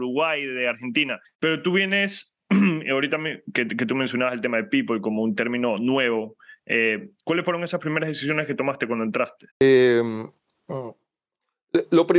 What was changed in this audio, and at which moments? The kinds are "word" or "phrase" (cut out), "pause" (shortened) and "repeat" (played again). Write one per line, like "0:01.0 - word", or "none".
0:01.2 - pause
0:09.5 - pause